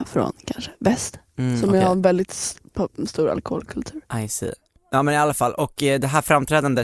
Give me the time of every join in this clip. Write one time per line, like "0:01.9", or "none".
none